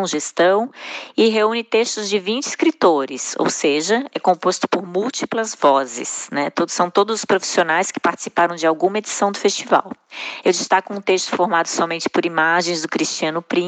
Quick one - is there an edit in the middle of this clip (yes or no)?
no